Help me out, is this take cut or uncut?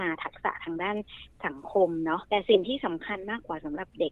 cut